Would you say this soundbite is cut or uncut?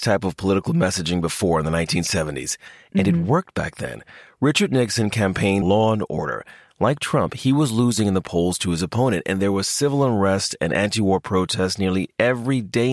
cut